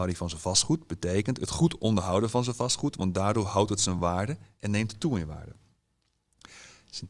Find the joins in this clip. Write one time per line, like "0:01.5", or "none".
none